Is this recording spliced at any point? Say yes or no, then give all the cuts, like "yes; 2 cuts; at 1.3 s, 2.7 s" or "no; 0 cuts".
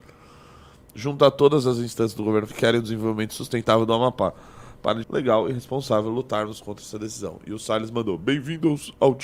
yes; 2 cuts; at 2.5 s, 5.0 s